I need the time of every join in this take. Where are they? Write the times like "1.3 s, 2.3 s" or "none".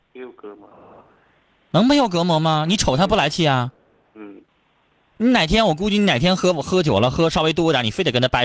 none